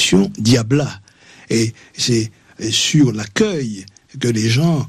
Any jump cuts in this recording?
no; 0 cuts

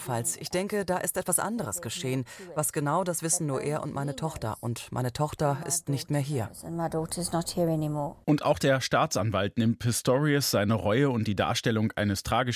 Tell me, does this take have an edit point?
no; 0 cuts

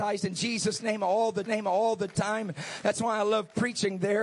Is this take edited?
yes; 1 cut; at 1.4 s

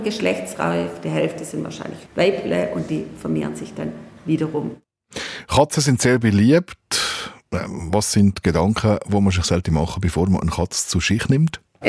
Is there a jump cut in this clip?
yes; 1 cut; at 2.1 s

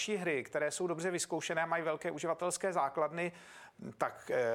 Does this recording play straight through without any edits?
yes; 0 cuts

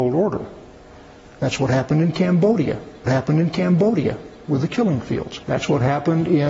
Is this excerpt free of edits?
no; 2 cuts; at 3.1 s, 5.4 s

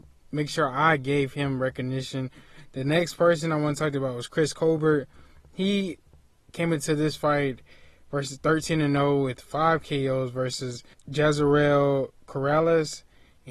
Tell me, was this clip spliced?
no; 0 cuts

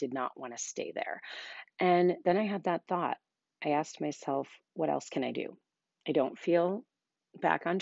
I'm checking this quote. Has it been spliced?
no; 0 cuts

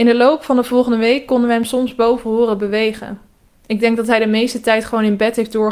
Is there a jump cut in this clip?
no; 0 cuts

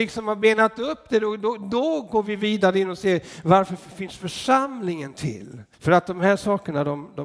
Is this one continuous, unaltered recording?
no; 1 cut; at 5.7 s

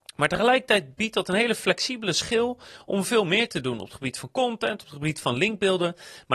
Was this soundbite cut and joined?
no; 0 cuts

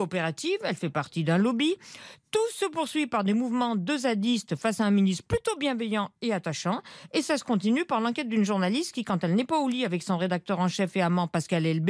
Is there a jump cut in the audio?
no; 0 cuts

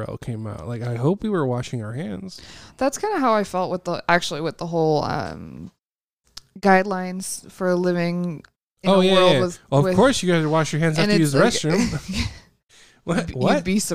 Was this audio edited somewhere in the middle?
no; 0 cuts

